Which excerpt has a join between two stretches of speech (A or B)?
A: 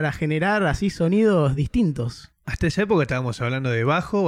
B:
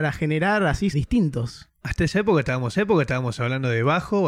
B